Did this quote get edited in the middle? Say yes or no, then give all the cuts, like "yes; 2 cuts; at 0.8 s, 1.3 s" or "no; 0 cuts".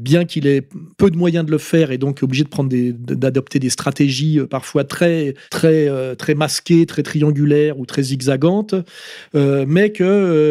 yes; 1 cut; at 0.9 s